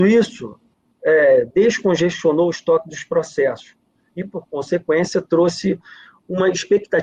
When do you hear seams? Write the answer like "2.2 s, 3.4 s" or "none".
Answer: none